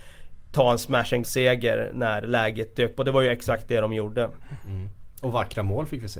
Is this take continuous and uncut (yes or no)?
no